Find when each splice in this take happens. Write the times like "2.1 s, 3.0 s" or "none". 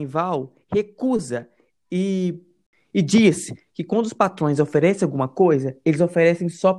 none